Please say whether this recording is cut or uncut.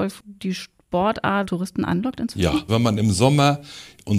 cut